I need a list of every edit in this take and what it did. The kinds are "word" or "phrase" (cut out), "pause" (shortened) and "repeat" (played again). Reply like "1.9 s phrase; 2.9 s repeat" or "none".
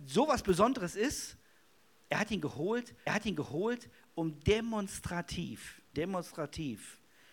1.8 s pause; 3.1 s repeat; 5.9 s word